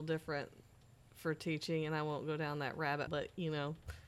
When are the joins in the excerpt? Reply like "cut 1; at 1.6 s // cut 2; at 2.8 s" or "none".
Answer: cut 1; at 3.1 s